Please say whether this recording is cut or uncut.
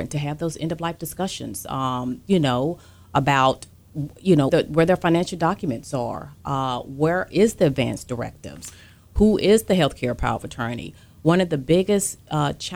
cut